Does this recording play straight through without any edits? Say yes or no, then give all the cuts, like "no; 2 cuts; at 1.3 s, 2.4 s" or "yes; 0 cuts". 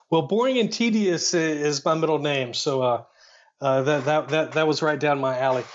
yes; 0 cuts